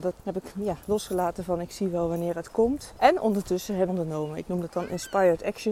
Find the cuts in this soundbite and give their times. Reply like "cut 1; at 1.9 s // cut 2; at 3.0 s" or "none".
cut 1; at 3.9 s